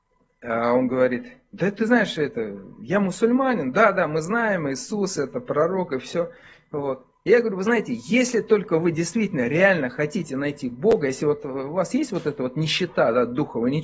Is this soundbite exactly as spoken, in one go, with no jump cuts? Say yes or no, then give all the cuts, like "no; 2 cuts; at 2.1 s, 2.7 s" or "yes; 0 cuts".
yes; 0 cuts